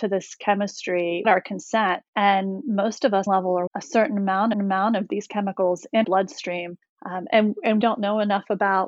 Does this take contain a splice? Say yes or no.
yes